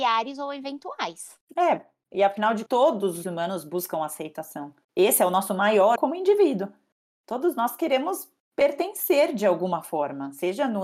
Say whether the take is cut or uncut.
cut